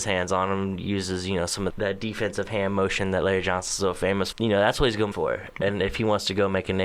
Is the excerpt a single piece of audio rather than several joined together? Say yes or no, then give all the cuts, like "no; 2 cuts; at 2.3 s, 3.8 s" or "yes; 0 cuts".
no; 3 cuts; at 1.7 s, 4.3 s, 5.1 s